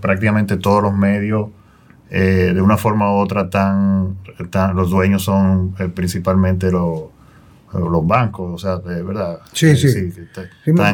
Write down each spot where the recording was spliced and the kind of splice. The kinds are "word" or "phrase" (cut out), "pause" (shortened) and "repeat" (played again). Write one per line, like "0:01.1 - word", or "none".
none